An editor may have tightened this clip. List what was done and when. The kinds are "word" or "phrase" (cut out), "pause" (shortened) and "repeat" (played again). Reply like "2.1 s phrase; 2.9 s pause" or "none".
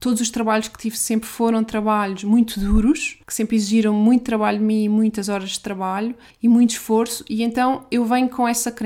3.2 s pause; 6.3 s pause